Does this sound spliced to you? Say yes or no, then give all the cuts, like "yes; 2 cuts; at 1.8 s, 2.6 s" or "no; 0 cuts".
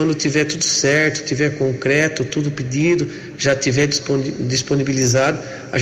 no; 0 cuts